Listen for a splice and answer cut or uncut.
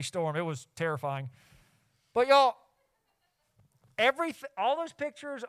uncut